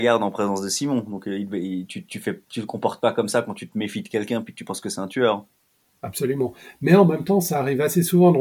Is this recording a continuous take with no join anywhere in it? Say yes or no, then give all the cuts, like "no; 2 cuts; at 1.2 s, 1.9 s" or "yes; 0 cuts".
yes; 0 cuts